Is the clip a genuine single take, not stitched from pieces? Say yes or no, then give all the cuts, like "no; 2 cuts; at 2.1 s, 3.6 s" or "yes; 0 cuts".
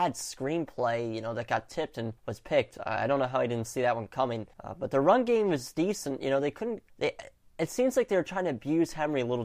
no; 3 cuts; at 2.2 s, 4.5 s, 6.9 s